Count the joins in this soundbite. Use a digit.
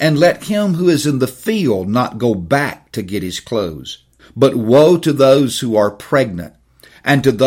1